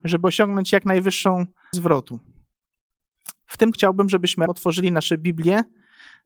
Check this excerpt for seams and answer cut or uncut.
cut